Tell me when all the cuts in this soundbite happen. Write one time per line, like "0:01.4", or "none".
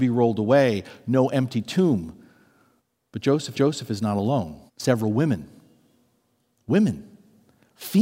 0:02.8
0:03.5
0:04.7